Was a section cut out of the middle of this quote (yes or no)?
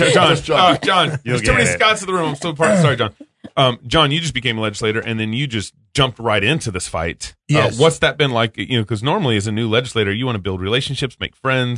yes